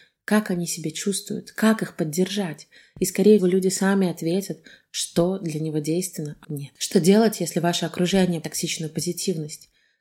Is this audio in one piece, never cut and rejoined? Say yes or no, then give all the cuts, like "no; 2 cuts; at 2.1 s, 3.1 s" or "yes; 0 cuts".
no; 3 cuts; at 3.4 s, 6.4 s, 8.4 s